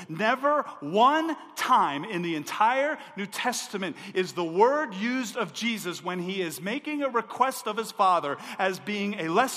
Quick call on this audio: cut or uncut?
uncut